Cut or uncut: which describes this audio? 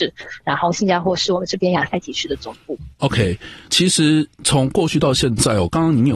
cut